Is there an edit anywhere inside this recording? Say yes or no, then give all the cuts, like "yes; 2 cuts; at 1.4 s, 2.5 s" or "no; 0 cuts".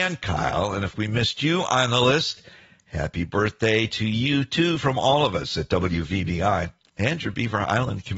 no; 0 cuts